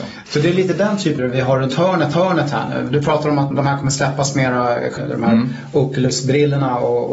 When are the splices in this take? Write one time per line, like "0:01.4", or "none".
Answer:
0:01.2
0:02.1
0:03.5
0:05.0